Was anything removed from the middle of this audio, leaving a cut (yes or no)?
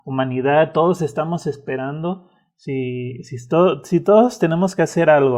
no